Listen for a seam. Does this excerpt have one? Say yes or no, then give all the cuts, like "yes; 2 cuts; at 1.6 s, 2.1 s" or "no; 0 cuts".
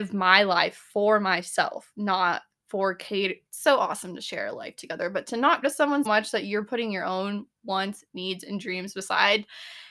yes; 3 cuts; at 3.5 s, 5.6 s, 6.1 s